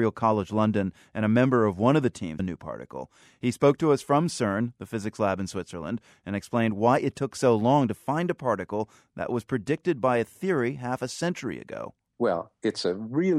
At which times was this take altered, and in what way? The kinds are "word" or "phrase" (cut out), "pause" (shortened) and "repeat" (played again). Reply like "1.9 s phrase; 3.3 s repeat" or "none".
2.4 s phrase